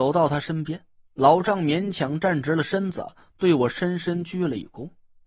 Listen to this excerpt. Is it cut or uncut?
uncut